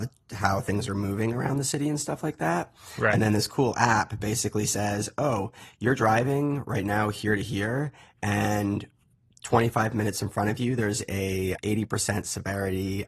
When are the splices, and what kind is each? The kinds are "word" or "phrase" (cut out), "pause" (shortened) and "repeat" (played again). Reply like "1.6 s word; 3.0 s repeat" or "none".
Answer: none